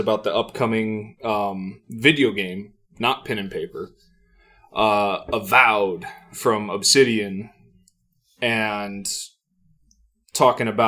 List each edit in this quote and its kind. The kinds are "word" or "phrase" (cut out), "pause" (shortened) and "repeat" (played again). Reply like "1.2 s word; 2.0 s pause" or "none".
none